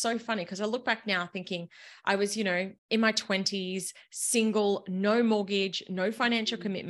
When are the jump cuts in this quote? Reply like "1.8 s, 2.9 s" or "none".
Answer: 2.8 s